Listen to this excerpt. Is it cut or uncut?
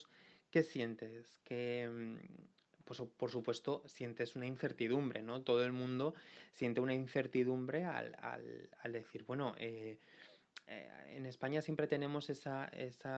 uncut